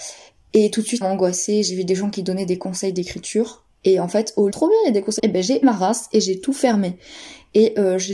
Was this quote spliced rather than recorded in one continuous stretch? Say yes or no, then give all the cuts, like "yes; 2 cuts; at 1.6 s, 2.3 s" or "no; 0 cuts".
yes; 5 cuts; at 1.0 s, 3.8 s, 4.5 s, 5.2 s, 5.6 s